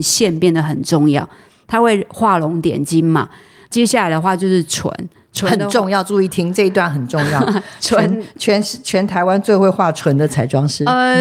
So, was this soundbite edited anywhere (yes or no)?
no